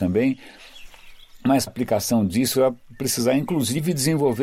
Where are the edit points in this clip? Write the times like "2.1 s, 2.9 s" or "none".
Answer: 1.7 s, 2.5 s